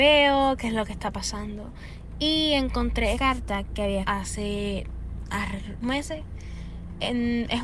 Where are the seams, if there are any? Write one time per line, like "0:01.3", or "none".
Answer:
0:03.1
0:04.0
0:05.8